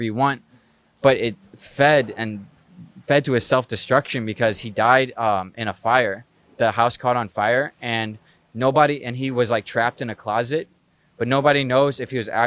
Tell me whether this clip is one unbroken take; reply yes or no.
yes